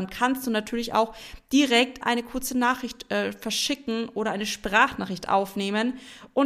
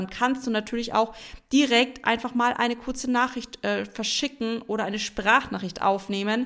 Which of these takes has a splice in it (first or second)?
first